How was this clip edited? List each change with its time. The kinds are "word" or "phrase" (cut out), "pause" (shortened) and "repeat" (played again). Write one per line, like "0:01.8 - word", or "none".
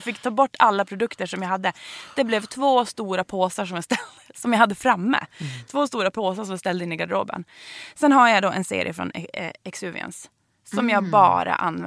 none